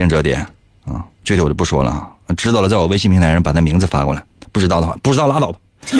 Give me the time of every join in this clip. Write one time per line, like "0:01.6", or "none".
0:01.1